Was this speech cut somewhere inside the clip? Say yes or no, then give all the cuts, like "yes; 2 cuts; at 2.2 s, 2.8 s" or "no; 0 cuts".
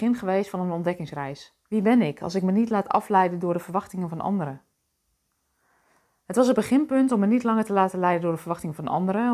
yes; 1 cut; at 1.6 s